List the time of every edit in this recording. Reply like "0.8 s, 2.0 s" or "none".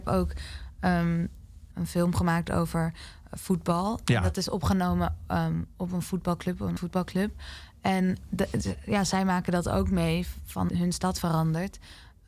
1.7 s, 6.8 s, 10.7 s